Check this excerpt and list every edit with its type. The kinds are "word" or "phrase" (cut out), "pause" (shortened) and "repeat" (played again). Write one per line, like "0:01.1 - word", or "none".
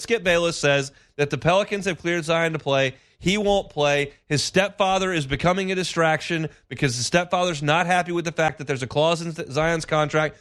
none